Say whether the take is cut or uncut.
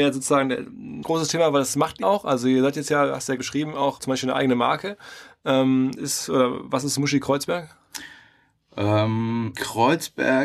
cut